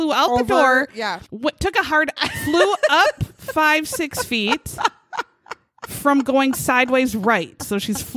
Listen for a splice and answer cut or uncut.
cut